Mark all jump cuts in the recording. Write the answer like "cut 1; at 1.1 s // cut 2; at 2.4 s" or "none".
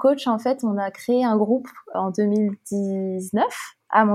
cut 1; at 1.9 s